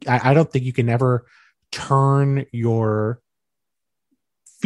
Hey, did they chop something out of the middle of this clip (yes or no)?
no